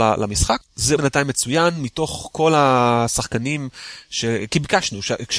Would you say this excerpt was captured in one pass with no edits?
no; 1 cut; at 1.0 s

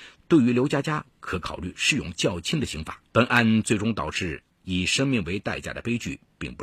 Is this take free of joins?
no; 1 cut; at 3.1 s

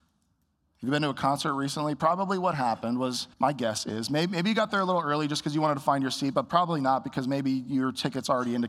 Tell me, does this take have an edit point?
yes; 1 cut; at 3.3 s

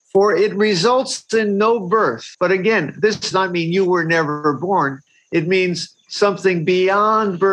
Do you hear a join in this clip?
yes; 2 cuts; at 2.3 s, 3.3 s

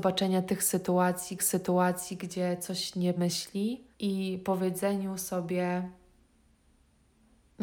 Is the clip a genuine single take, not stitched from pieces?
no; 3 cuts; at 1.4 s, 3.2 s, 3.9 s

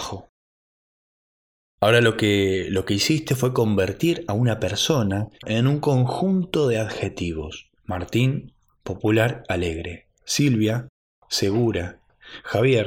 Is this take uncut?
no; 3 cuts; at 5.4 s, 7.8 s, 10.1 s

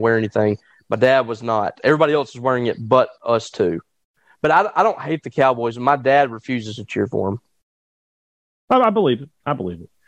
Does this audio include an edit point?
no; 0 cuts

